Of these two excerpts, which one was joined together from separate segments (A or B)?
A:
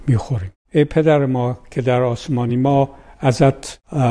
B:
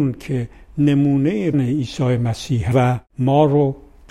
B